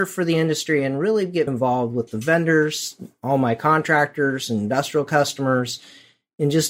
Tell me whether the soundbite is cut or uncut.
cut